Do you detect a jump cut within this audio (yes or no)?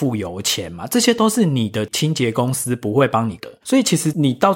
yes